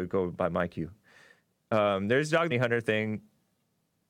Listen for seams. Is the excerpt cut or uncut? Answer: cut